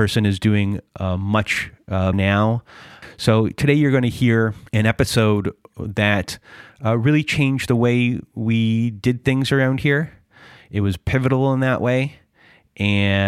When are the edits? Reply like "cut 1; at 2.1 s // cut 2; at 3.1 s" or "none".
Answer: cut 1; at 2.1 s // cut 2; at 4.7 s